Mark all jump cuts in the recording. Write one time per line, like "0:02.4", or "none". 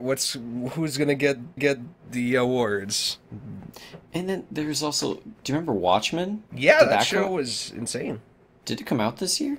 0:01.6
0:06.5